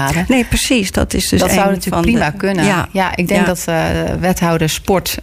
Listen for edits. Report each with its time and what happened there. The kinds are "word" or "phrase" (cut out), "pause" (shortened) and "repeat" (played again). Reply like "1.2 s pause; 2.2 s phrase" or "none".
none